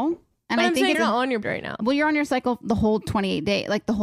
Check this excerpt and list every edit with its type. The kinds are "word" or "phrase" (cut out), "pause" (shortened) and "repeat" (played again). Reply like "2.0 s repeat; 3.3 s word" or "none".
0.9 s phrase; 1.4 s word